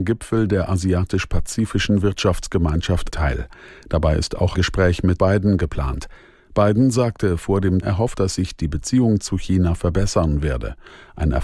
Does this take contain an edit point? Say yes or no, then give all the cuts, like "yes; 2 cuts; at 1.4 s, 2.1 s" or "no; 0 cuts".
yes; 5 cuts; at 3.1 s, 4.5 s, 5.2 s, 7.8 s, 8.1 s